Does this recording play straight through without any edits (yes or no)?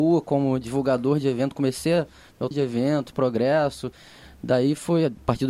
no